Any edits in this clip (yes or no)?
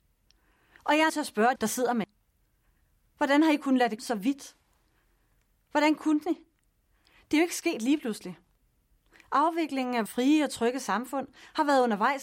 yes